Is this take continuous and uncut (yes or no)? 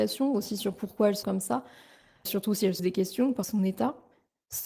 no